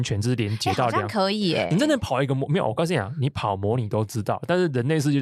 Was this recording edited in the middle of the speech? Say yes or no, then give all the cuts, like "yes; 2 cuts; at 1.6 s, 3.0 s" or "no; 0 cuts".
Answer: no; 0 cuts